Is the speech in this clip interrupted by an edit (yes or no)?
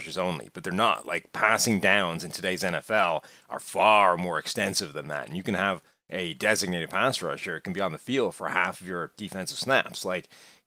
no